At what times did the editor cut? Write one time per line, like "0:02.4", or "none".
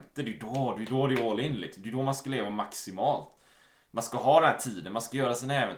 none